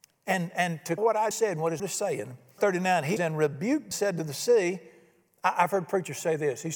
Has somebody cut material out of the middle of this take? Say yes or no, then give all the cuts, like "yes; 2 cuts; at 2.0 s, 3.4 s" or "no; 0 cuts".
yes; 6 cuts; at 1.0 s, 1.3 s, 1.8 s, 2.6 s, 3.2 s, 3.9 s